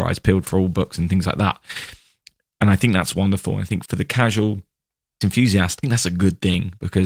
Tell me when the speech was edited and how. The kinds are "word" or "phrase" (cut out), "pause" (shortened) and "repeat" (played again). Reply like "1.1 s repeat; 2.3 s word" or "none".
3.8 s word; 5.2 s word; 5.8 s word